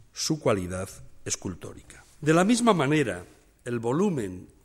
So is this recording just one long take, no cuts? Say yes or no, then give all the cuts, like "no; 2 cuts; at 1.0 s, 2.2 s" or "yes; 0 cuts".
no; 1 cut; at 2.1 s